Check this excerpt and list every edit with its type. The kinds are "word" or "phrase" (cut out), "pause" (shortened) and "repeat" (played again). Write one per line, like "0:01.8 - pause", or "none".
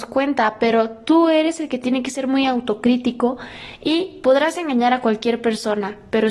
none